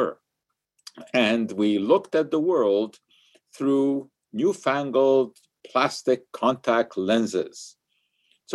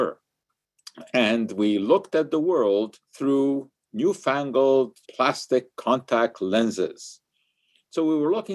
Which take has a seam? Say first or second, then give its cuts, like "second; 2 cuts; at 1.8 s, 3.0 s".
second; 2 cuts; at 3.1 s, 5.0 s